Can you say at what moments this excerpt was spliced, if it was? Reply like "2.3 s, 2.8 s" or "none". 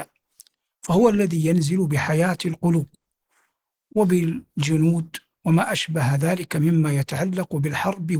none